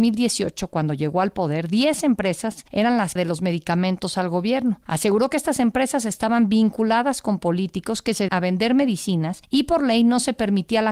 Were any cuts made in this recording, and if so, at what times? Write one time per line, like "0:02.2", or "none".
0:03.2
0:08.3